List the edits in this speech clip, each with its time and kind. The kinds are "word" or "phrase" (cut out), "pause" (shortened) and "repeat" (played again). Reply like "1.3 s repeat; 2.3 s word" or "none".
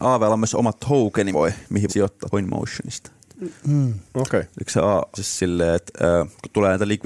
1.3 s word; 1.9 s word; 2.3 s word; 4.0 s pause; 5.1 s phrase